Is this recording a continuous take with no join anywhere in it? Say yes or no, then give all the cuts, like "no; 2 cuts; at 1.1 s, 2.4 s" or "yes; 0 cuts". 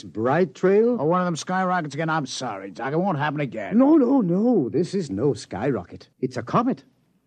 no; 1 cut; at 6.1 s